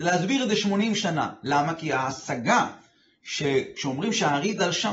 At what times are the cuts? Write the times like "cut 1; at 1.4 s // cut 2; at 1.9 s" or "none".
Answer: none